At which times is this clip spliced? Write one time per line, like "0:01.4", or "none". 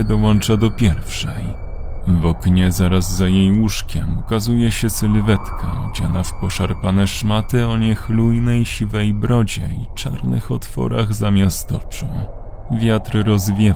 none